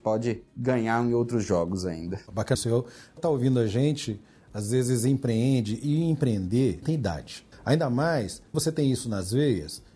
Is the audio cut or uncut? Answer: cut